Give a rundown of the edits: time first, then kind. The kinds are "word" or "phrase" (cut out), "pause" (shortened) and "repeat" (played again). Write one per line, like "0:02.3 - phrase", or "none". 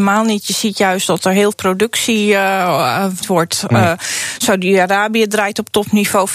0:01.5 - word
0:03.2 - word